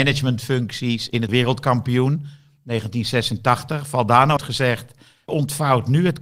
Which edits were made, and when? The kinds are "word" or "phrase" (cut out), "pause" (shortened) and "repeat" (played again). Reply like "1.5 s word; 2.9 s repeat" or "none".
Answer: 1.3 s word; 4.4 s word; 5.3 s word